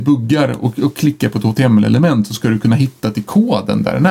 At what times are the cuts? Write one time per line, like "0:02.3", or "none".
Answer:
none

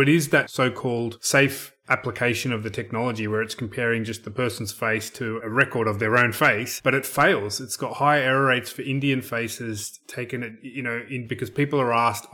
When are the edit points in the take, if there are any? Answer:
0:05.4
0:11.3

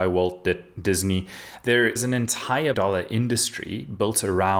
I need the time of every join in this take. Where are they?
0:02.0
0:02.7

